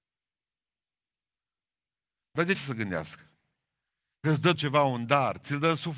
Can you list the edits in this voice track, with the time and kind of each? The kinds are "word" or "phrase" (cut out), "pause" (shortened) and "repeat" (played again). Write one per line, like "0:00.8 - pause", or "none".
0:02.5 - word
0:04.2 - word
0:04.5 - word